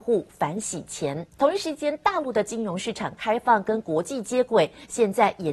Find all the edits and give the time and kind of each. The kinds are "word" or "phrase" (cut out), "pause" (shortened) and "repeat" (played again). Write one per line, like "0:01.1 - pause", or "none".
0:01.3 - pause

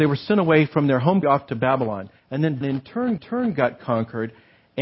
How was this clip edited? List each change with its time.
0:01.2 - word
0:02.2 - pause
0:02.6 - word
0:03.2 - repeat

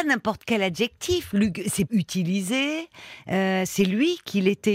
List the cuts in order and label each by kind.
0:01.9 - word

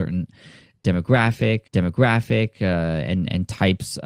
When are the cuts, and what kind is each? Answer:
0:01.7 - repeat

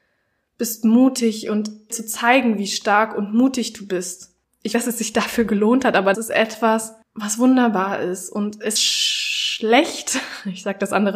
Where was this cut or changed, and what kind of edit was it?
0:01.9 - phrase
0:04.7 - phrase
0:06.1 - word
0:08.8 - word

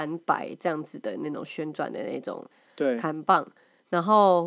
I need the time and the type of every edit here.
none

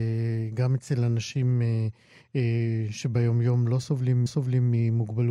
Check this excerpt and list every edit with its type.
0:04.3 - repeat

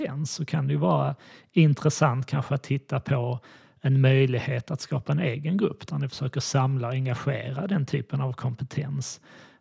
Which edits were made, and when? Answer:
none

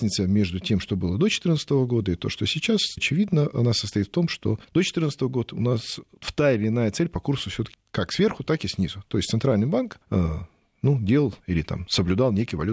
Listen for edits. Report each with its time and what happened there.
0:03.0 - word
0:04.6 - pause
0:07.7 - word
0:10.0 - pause
0:11.4 - pause

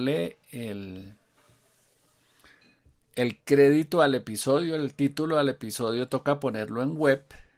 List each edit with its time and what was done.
none

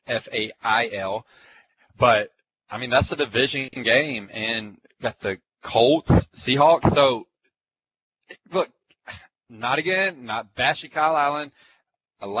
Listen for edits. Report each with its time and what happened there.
none

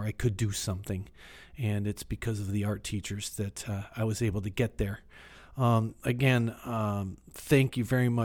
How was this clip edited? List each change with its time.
none

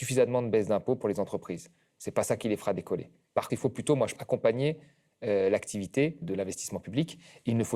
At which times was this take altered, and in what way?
0:03.5 - word
0:04.2 - word
0:06.2 - word

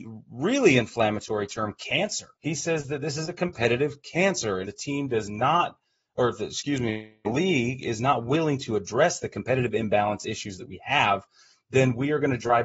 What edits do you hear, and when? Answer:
0:02.3 - pause
0:04.6 - word

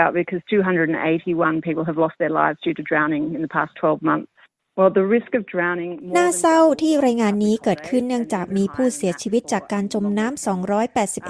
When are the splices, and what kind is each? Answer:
none

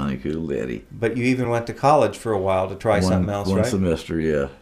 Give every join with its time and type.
none

